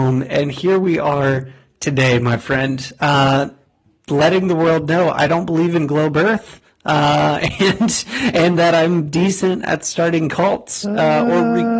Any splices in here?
no; 0 cuts

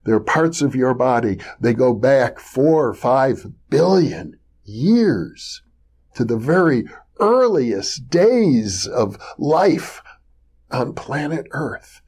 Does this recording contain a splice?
no; 0 cuts

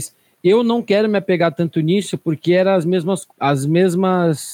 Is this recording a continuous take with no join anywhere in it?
no; 1 cut; at 3.3 s

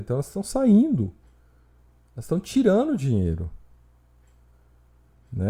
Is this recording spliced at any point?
no; 0 cuts

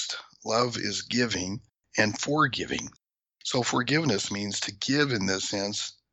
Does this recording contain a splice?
no; 0 cuts

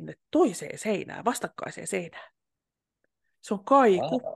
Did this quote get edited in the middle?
no; 0 cuts

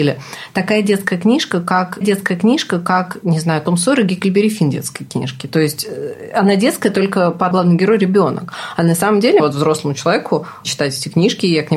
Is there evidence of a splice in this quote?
yes; 4 cuts; at 2.0 s, 7.5 s, 9.4 s, 10.6 s

